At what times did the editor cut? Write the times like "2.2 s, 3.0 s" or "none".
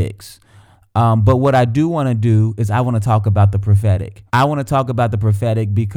4.3 s

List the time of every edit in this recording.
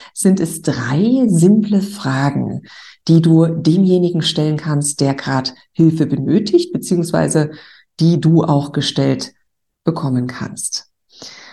none

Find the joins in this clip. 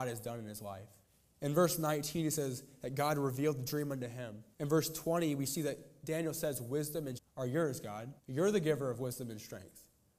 1.0 s, 4.5 s, 7.2 s, 8.2 s

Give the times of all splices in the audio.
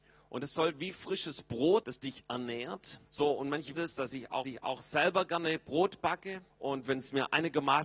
1.8 s, 3.1 s, 3.7 s, 4.4 s, 6.5 s

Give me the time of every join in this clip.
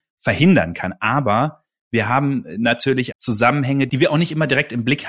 3.1 s

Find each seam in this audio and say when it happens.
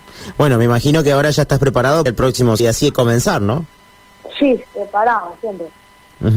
2.1 s, 2.6 s, 4.6 s

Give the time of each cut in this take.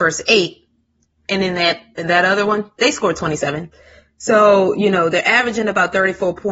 2.8 s

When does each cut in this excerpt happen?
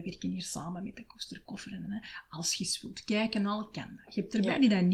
none

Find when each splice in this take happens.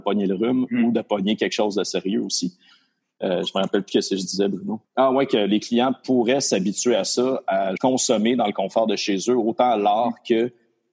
4.8 s, 7.8 s

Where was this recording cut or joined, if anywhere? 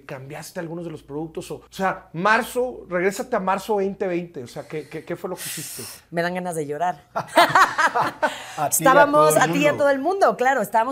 1.7 s

